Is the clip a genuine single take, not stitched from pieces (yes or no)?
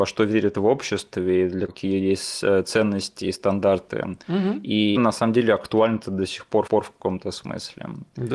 no